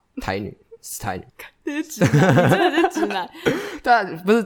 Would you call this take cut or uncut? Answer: cut